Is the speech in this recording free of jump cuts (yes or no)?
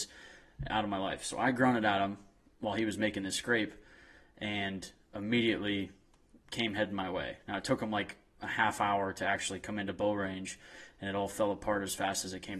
yes